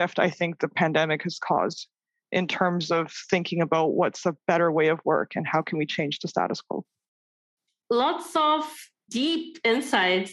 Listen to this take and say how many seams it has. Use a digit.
0